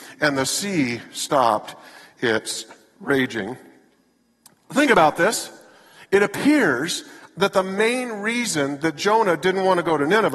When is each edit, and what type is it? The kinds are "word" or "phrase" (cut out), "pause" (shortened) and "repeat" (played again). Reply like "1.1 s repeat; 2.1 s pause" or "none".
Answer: none